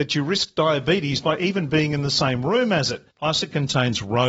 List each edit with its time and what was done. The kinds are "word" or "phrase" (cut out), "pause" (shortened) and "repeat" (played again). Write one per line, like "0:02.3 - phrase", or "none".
0:03.1 - pause